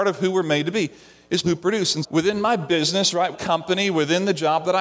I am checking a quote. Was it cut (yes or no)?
yes